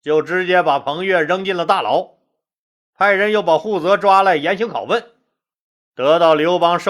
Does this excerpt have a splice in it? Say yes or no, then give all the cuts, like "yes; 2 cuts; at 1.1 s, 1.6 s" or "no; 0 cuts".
no; 0 cuts